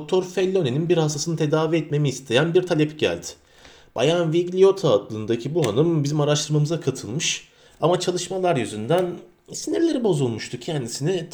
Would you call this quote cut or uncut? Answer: uncut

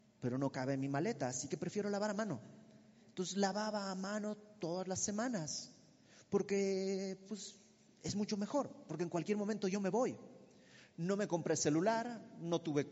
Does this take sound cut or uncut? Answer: uncut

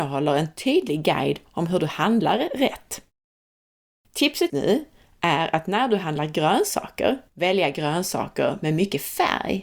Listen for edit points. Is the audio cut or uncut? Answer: cut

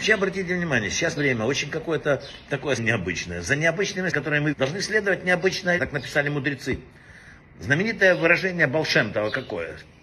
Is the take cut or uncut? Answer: cut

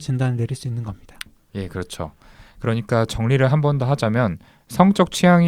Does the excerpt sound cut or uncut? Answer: uncut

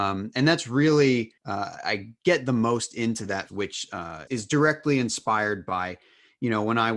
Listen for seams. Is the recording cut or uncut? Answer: cut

